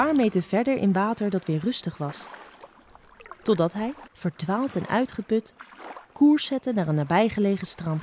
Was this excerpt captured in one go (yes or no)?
no